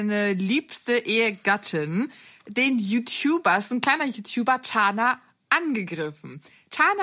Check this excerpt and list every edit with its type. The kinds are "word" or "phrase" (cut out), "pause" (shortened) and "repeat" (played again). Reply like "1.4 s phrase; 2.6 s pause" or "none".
none

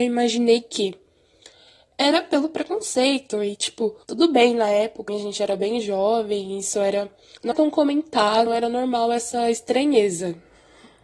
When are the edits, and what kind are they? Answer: 4.0 s pause; 5.1 s word; 7.5 s word; 8.5 s word

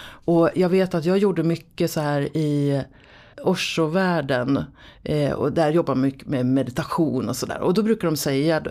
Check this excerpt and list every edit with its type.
none

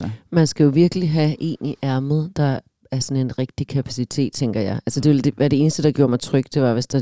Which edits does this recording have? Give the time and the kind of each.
none

